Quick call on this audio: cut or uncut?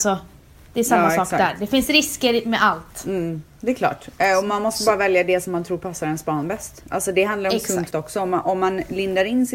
cut